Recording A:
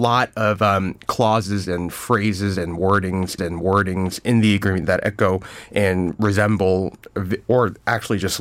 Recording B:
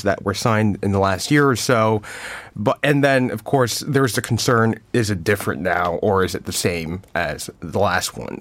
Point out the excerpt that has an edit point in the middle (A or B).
A